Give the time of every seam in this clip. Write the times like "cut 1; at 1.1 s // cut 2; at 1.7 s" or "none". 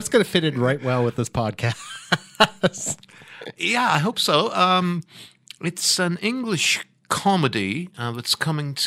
none